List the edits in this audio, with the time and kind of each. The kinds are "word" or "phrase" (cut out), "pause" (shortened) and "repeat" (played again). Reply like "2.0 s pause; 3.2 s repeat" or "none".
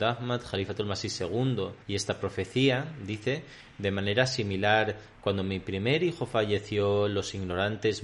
1.8 s pause